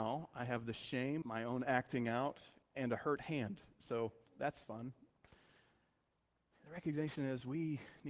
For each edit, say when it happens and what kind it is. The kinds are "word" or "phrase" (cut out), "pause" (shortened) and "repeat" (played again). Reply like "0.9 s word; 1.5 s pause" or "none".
1.2 s word